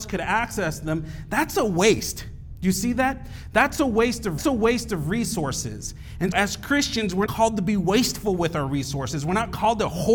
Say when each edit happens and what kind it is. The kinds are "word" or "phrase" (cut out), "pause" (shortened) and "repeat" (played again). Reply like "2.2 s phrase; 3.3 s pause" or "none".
4.4 s repeat; 6.3 s word; 7.3 s word

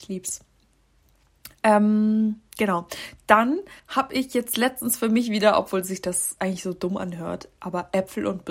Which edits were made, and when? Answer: 3.8 s pause

